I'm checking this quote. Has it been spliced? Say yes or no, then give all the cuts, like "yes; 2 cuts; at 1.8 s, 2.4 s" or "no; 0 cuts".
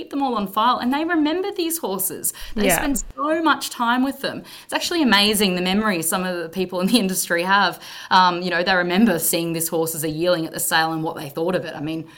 no; 0 cuts